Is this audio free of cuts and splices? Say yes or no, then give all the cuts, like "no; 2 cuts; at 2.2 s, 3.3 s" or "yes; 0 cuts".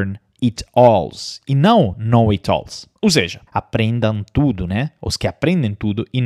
no; 2 cuts; at 3.0 s, 3.5 s